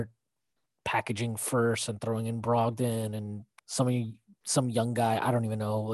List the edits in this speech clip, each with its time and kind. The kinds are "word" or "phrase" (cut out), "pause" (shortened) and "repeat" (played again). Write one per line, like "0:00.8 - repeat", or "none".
0:03.6 - pause